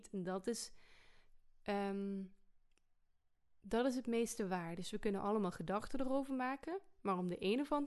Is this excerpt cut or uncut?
uncut